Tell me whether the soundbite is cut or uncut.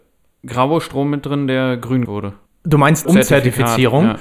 cut